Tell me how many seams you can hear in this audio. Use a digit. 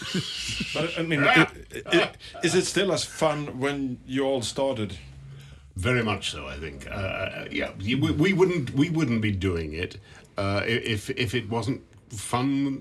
0